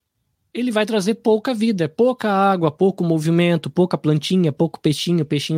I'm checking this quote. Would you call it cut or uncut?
uncut